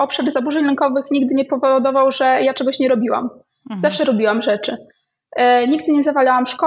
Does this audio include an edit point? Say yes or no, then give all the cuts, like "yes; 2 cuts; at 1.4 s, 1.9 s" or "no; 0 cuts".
no; 0 cuts